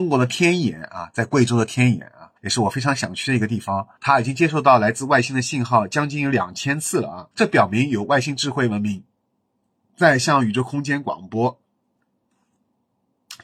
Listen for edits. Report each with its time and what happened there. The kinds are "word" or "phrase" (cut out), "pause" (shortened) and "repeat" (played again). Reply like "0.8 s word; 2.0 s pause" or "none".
2.4 s pause; 4.0 s pause; 7.3 s pause

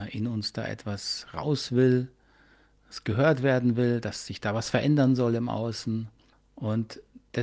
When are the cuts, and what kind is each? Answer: none

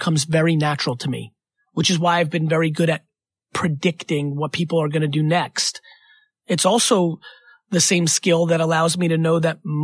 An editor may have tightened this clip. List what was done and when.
none

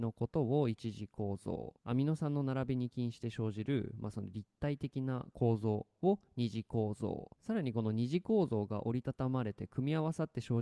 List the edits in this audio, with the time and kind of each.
1.8 s pause; 7.4 s pause

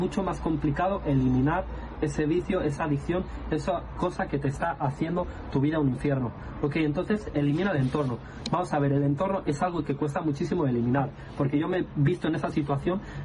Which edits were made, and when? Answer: 2.0 s word

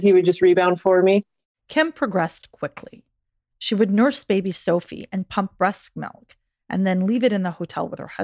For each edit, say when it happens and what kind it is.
none

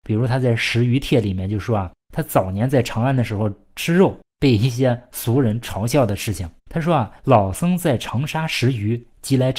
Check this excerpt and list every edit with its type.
2.0 s pause; 4.3 s pause; 6.6 s pause; 7.2 s pause

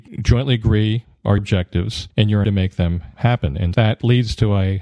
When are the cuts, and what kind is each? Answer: 1.4 s word; 2.4 s word; 3.7 s word

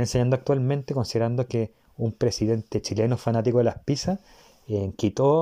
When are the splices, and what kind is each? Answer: none

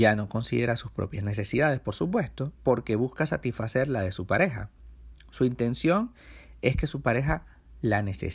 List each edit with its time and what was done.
2.6 s pause

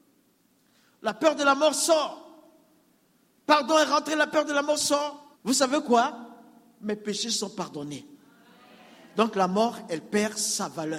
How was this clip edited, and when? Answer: 5.3 s pause

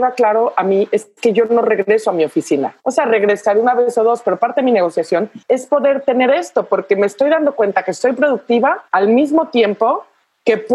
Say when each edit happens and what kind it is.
2.8 s pause; 5.4 s pause; 8.9 s pause

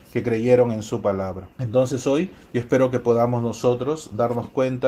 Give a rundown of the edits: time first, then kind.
1.5 s pause; 2.4 s pause

